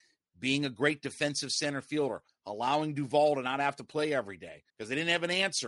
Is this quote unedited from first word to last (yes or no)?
no